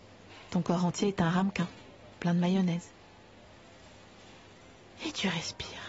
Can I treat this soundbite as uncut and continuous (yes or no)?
no